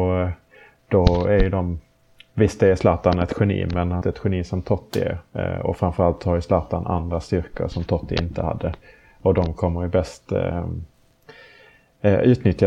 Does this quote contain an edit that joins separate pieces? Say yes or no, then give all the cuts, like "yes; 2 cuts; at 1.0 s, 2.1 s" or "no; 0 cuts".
yes; 1 cut; at 4.0 s